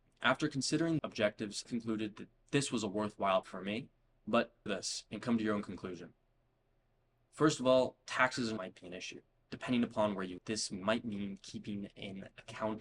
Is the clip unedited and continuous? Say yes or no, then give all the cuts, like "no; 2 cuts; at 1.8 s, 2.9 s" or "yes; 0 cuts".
no; 6 cuts; at 1.0 s, 1.7 s, 3.4 s, 4.7 s, 8.6 s, 10.4 s